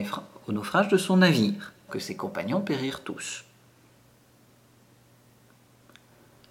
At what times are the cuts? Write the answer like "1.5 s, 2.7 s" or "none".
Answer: 1.9 s